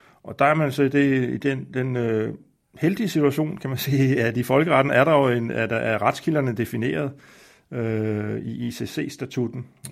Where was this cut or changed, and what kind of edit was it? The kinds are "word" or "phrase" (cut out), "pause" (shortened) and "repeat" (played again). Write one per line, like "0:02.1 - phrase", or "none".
none